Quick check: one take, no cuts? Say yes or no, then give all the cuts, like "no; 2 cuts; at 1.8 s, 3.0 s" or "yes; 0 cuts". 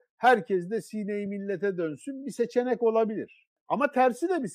yes; 0 cuts